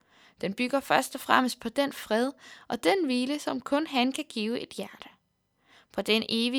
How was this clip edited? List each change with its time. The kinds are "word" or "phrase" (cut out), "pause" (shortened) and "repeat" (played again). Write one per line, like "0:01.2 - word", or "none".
none

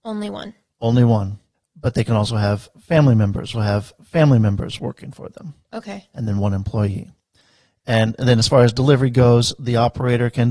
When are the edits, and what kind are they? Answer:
0:01.5 - pause
0:03.5 - repeat

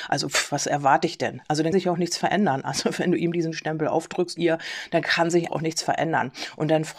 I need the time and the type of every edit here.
0:01.7 - word
0:04.4 - word
0:05.5 - word

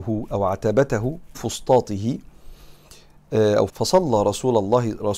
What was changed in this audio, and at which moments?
0:01.3 - word
0:03.7 - word

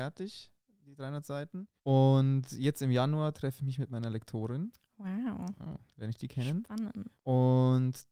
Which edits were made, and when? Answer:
0:01.8 - pause
0:07.2 - pause

